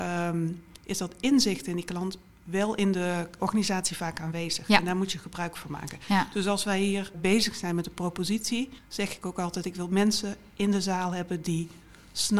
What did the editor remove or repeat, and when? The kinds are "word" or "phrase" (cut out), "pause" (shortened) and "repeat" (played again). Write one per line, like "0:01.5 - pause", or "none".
0:03.4 - word
0:07.1 - word
0:08.8 - pause